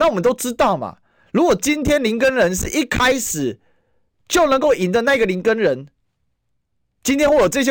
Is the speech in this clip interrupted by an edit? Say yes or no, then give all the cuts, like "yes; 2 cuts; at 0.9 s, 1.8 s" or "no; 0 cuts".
no; 0 cuts